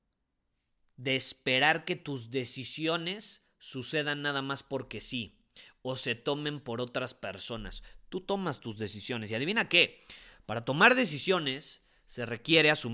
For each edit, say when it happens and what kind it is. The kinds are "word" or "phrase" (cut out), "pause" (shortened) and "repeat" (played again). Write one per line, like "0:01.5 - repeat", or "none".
none